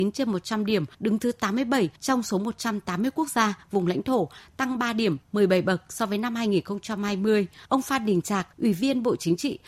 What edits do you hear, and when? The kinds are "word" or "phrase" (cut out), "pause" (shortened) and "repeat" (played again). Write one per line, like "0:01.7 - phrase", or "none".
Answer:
0:00.9 - pause
0:02.0 - pause
0:05.2 - pause
0:07.6 - pause
0:08.5 - pause